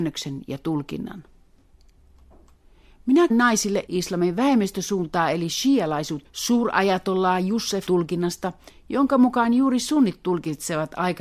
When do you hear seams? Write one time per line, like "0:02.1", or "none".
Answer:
0:03.3
0:03.9
0:06.2
0:07.9